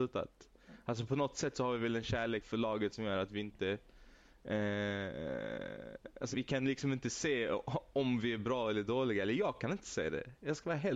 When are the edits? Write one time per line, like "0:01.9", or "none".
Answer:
0:02.4
0:06.3